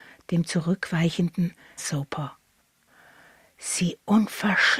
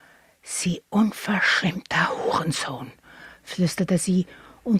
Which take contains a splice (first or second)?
first